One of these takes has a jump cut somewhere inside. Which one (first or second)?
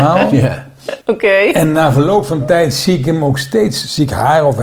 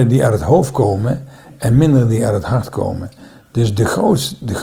first